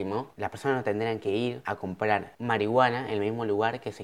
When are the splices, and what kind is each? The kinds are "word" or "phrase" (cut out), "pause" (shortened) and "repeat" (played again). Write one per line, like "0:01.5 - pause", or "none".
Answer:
none